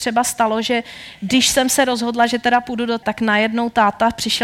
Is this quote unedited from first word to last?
no; 1 cut; at 3.0 s

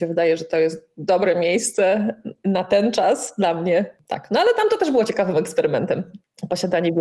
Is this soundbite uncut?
yes; 0 cuts

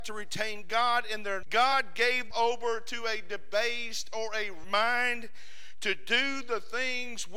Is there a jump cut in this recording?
yes; 3 cuts; at 1.4 s, 2.3 s, 4.6 s

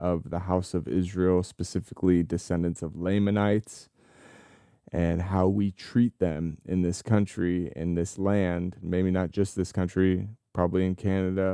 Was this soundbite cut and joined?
no; 0 cuts

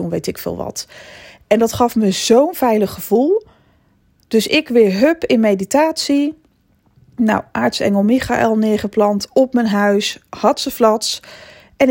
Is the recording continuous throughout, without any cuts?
yes; 0 cuts

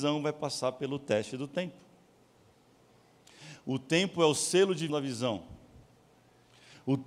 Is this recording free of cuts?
no; 1 cut; at 4.9 s

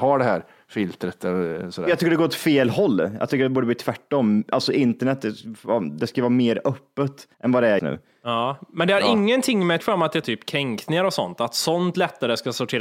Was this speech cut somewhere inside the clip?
yes; 4 cuts; at 7.3 s, 7.8 s, 9.8 s, 10.2 s

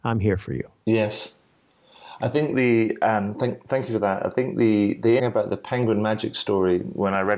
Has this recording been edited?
yes; 1 cut; at 5.2 s

